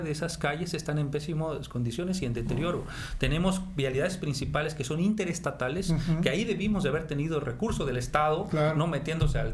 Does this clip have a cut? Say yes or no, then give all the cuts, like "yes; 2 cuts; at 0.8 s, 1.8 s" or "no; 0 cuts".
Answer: no; 0 cuts